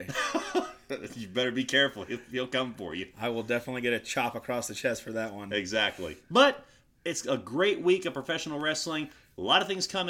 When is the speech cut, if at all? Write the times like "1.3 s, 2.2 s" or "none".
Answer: 6.2 s

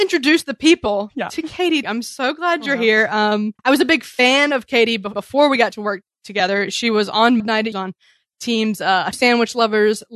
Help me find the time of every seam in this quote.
1.8 s, 3.6 s, 5.1 s, 7.4 s, 7.7 s, 9.1 s

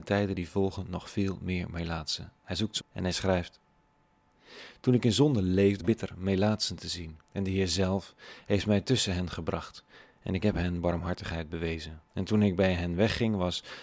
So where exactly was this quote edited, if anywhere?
2.8 s, 5.8 s, 7.2 s, 12.1 s

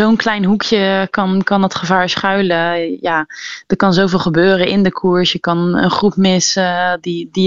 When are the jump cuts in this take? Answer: none

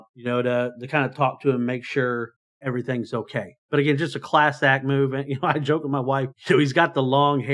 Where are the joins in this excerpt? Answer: 2.4 s

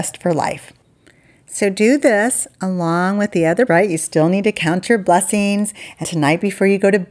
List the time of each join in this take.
3.7 s, 6.0 s

